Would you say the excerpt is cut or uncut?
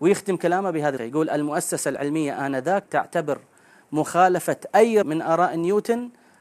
cut